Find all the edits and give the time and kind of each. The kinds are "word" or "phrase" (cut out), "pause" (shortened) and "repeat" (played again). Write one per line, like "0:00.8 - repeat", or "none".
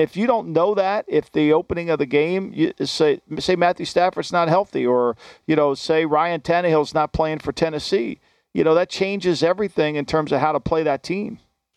none